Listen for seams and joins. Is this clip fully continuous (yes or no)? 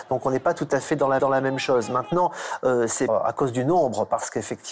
no